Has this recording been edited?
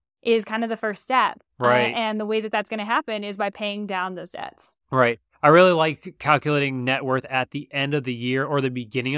yes; 2 cuts; at 1.5 s, 4.8 s

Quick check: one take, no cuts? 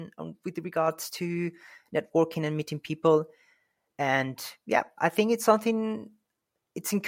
yes; 0 cuts

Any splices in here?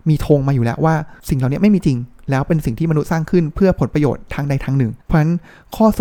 yes; 2 cuts; at 1.2 s, 5.0 s

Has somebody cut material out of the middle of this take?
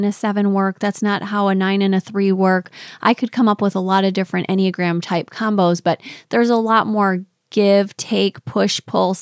no; 0 cuts

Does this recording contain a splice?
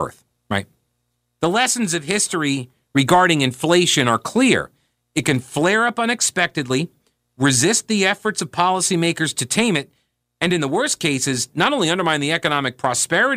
no; 0 cuts

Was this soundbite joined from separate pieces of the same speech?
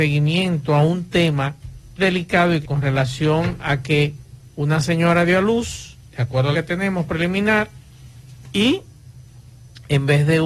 yes; 5 cuts; at 2.0 s, 2.6 s, 4.5 s, 6.1 s, 6.5 s

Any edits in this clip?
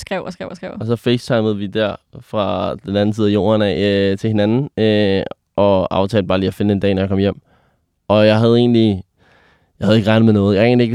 no; 0 cuts

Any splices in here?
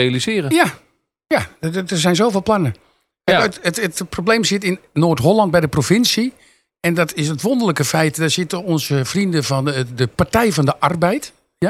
no; 0 cuts

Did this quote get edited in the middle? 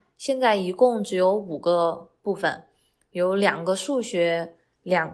no; 0 cuts

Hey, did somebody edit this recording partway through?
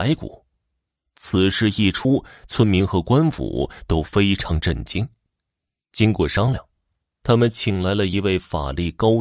no; 0 cuts

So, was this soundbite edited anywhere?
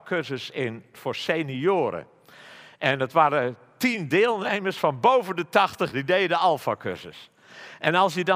yes; 2 cuts; at 0.9 s, 5.9 s

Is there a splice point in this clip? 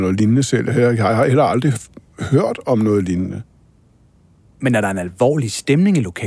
no; 0 cuts

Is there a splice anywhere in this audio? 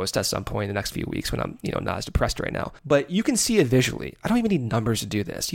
yes; 1 cut; at 2.8 s

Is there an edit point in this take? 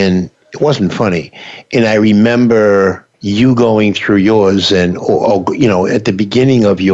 yes; 1 cut; at 3.1 s

